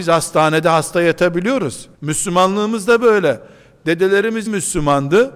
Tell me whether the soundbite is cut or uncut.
cut